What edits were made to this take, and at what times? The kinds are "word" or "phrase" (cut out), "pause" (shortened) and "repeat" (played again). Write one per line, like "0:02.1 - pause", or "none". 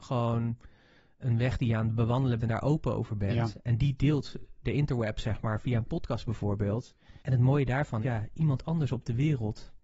0:02.4 - word
0:04.6 - word
0:07.2 - pause
0:08.0 - word